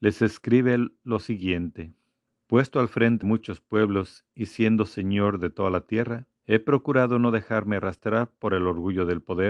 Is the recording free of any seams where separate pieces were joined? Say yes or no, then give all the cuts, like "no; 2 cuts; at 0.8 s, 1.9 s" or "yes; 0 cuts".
no; 3 cuts; at 2.3 s, 3.2 s, 6.4 s